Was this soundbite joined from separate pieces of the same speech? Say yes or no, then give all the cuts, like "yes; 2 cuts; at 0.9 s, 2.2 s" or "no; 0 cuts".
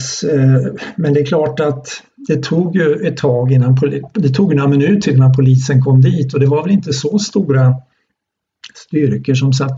no; 0 cuts